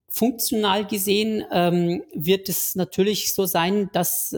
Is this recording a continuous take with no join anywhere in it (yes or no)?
yes